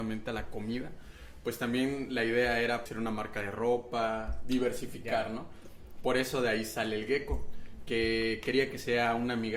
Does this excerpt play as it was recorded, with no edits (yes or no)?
no